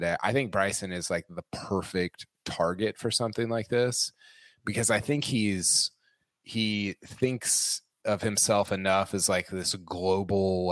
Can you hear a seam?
no; 0 cuts

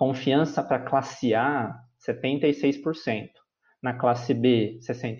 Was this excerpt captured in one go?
yes; 0 cuts

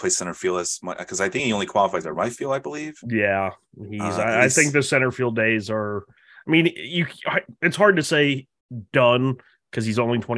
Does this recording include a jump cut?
no; 0 cuts

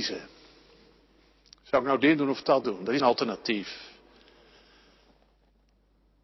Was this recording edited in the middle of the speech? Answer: yes; 1 cut; at 3.0 s

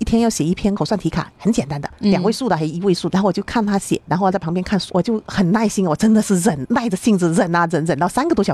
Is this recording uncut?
no; 1 cut; at 1.3 s

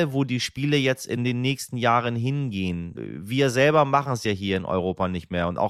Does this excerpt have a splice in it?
no; 0 cuts

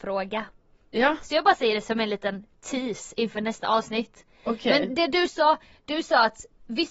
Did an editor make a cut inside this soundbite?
no; 0 cuts

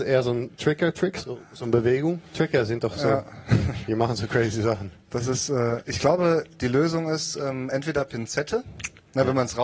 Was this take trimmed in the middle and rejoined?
no; 0 cuts

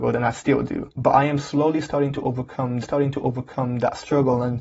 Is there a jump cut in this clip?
yes; 2 cuts; at 0.9 s, 2.8 s

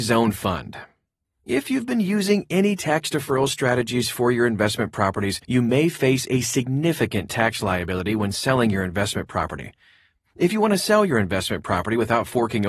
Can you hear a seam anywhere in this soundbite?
yes; 1 cut; at 5.4 s

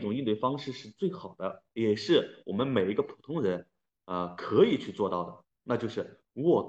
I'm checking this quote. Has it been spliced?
no; 0 cuts

